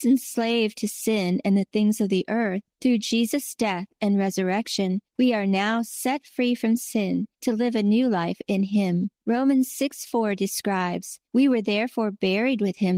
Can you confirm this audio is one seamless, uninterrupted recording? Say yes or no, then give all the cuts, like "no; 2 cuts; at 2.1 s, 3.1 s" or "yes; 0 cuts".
no; 5 cuts; at 2.7 s, 5.1 s, 7.3 s, 9.2 s, 11.3 s